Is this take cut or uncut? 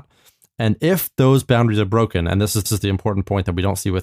cut